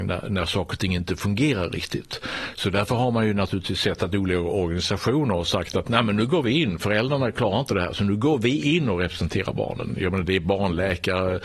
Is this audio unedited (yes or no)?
yes